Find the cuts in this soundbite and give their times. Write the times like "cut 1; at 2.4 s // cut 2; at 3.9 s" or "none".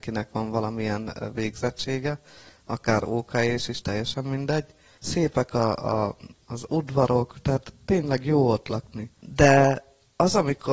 none

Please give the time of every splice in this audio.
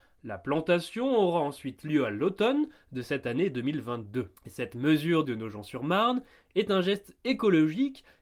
cut 1; at 4.4 s // cut 2; at 5.2 s

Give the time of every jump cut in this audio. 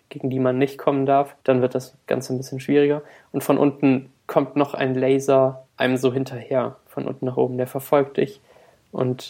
cut 1; at 1.4 s // cut 2; at 4.2 s // cut 3; at 5.7 s

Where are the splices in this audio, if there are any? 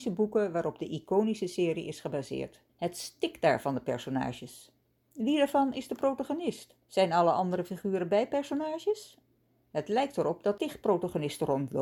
cut 1; at 2.7 s // cut 2; at 6.8 s // cut 3; at 10.6 s

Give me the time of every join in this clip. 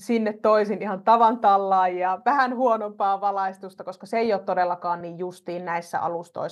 none

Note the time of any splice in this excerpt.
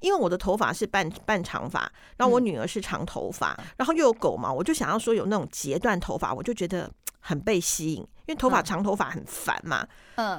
cut 1; at 3.6 s

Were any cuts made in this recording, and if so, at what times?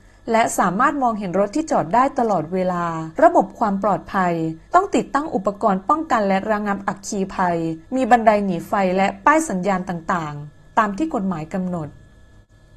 cut 1; at 3.1 s // cut 2; at 4.7 s // cut 3; at 7.9 s

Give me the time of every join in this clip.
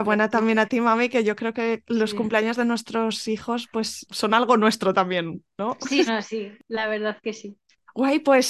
cut 1; at 5.5 s // cut 2; at 6.1 s

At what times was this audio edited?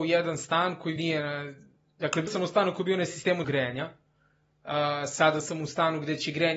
cut 1; at 1.0 s // cut 2; at 2.3 s // cut 3; at 3.4 s

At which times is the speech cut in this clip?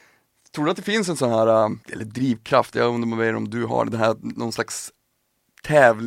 cut 1; at 1.8 s

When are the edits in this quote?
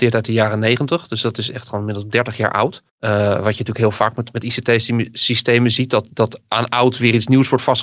cut 1; at 2.9 s

